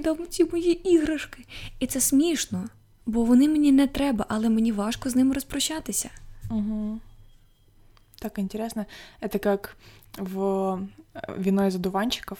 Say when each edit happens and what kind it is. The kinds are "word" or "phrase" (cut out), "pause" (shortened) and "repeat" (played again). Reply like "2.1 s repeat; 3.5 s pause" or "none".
none